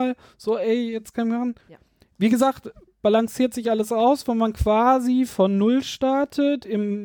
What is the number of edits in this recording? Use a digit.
2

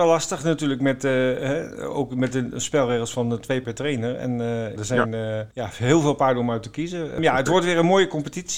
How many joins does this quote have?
3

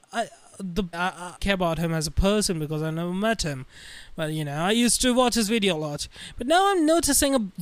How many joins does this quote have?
2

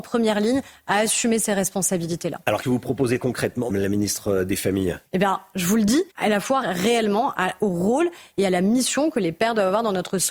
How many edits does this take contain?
6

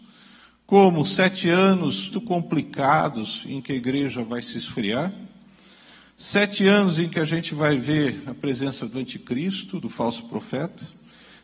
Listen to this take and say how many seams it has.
1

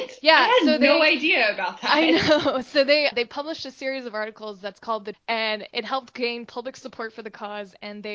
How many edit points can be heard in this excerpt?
3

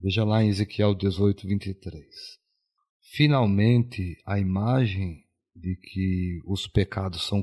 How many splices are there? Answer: 0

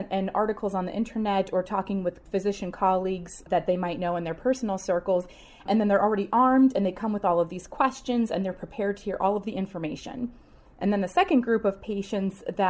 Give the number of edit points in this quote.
0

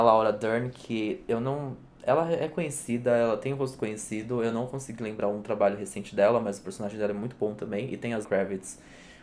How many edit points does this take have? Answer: 1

